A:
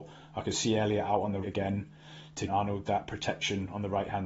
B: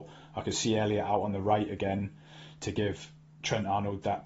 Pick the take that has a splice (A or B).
A